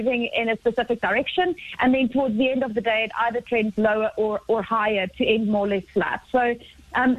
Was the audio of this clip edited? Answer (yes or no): no